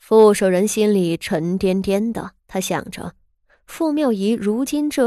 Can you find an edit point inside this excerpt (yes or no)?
yes